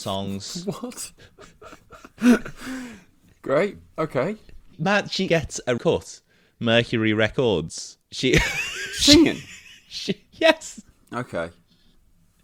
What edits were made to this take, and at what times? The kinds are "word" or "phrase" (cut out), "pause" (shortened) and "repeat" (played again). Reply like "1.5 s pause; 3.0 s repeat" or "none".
5.3 s word; 5.8 s word; 10.3 s word